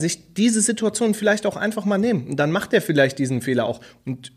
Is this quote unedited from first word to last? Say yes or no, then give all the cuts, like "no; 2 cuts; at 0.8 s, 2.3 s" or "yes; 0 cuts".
yes; 0 cuts